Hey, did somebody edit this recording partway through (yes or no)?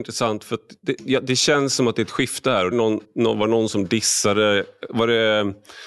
yes